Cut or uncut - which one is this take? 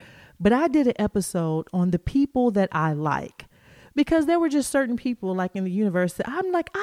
uncut